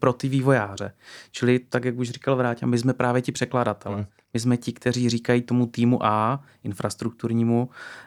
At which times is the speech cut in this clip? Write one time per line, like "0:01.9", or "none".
none